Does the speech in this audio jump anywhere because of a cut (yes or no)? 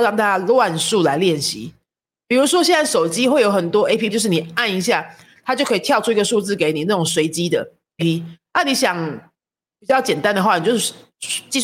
yes